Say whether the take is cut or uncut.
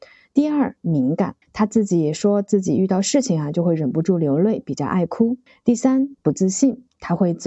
cut